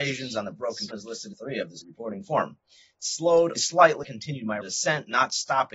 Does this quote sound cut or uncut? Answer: cut